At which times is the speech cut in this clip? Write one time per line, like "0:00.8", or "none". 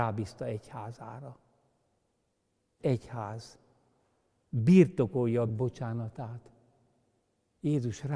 0:02.8
0:05.5